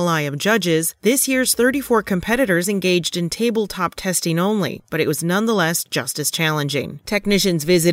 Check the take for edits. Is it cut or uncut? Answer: uncut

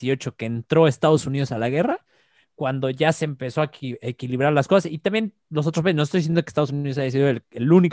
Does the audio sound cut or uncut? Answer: uncut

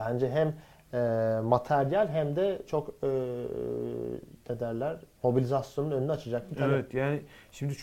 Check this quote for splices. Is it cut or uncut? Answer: uncut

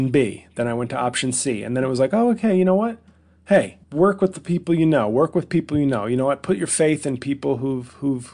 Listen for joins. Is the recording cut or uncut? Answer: cut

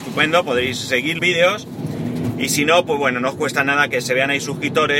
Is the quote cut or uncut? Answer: cut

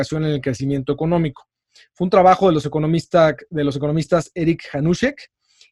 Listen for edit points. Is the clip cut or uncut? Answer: uncut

